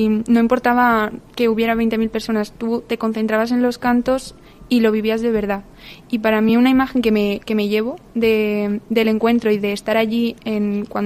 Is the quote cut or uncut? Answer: uncut